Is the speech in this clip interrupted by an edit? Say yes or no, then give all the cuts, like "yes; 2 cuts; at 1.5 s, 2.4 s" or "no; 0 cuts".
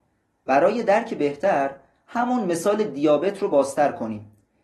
no; 0 cuts